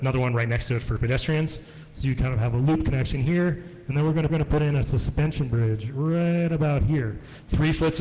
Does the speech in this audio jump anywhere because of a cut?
yes; 1 cut; at 4.3 s

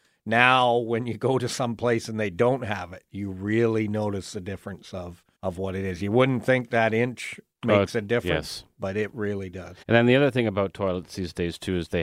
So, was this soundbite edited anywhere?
yes; 2 cuts; at 5.3 s, 9.8 s

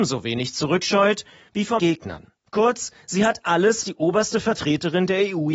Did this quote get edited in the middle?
yes; 3 cuts; at 1.8 s, 3.0 s, 3.8 s

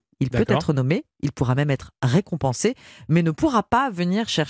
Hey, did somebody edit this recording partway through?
no; 0 cuts

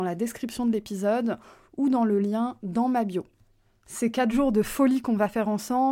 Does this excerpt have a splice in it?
no; 0 cuts

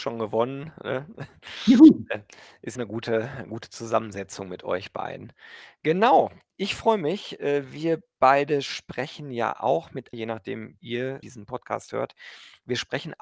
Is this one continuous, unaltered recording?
no; 4 cuts; at 2.8 s, 10.1 s, 10.8 s, 11.2 s

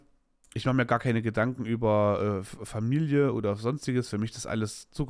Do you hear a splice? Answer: no; 0 cuts

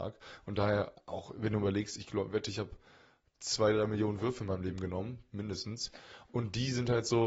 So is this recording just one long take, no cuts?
yes; 0 cuts

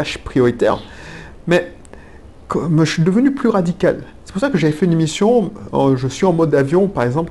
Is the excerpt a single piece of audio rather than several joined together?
yes; 0 cuts

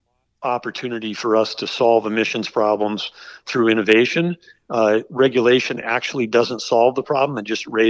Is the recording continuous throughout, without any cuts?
yes; 0 cuts

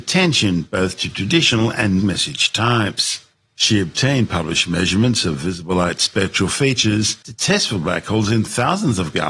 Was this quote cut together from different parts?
yes; 1 cut; at 2.0 s

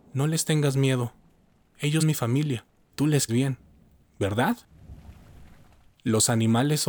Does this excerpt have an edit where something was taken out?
yes; 3 cuts; at 2.0 s, 2.9 s, 3.3 s

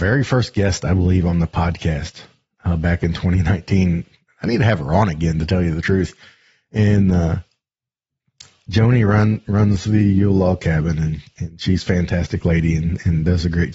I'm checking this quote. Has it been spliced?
no; 0 cuts

